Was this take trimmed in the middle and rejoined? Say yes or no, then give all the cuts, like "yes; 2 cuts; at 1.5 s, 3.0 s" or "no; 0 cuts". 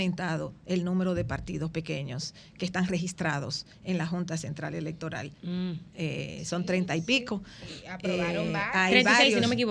no; 0 cuts